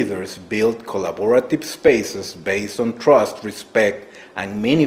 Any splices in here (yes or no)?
no